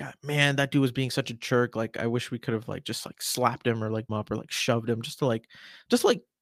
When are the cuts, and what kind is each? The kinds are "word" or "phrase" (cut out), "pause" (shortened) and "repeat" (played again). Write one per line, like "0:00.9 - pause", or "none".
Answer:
0:04.1 - phrase

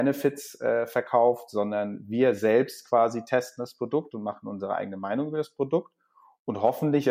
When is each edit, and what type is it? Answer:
none

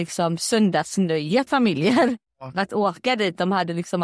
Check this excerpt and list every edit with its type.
0:01.5 - word
0:02.3 - pause

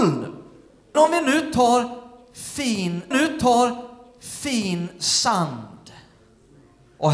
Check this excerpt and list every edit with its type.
0:00.9 - word
0:03.1 - repeat

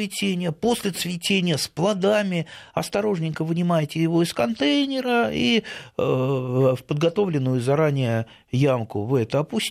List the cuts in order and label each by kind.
none

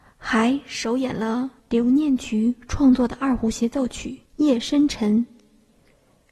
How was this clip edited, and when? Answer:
0:01.6 - pause
0:04.3 - pause

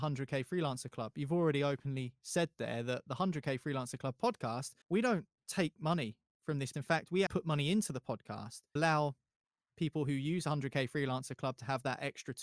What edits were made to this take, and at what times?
0:04.8 - pause
0:05.4 - pause
0:06.7 - word
0:07.3 - word
0:08.8 - word

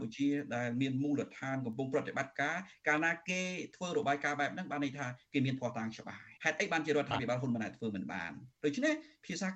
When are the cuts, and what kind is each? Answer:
0:06.4 - pause
0:08.5 - pause

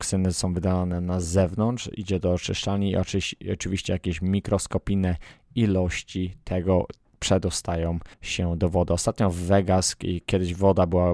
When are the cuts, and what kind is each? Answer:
0:08.1 - pause

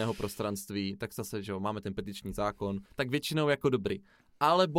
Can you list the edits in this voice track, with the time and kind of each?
0:02.9 - pause

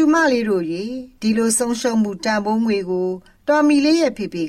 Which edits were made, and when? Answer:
none

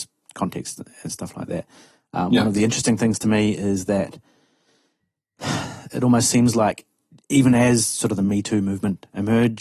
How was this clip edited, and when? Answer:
none

